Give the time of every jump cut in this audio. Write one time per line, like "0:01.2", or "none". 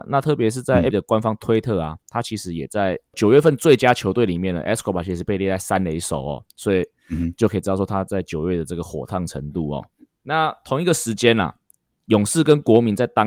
0:00.9
0:10.1